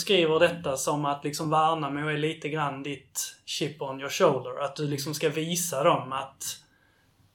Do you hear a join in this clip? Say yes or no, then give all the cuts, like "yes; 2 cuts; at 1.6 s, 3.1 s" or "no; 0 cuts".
no; 0 cuts